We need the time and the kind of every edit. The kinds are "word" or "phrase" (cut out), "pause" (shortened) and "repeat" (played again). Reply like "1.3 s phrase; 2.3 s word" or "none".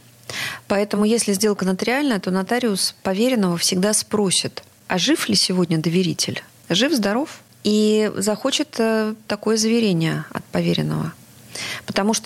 none